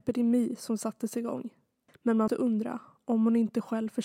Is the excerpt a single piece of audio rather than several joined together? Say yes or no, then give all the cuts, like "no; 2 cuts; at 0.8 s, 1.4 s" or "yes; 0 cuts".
no; 2 cuts; at 1.9 s, 2.3 s